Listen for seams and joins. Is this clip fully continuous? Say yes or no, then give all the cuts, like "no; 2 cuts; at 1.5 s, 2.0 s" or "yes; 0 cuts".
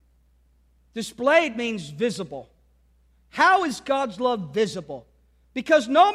yes; 0 cuts